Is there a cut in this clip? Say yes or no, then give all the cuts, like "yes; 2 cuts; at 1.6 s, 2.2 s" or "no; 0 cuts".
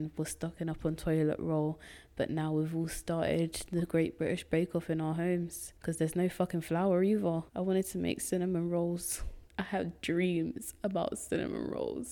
yes; 3 cuts; at 5.8 s, 7.5 s, 9.5 s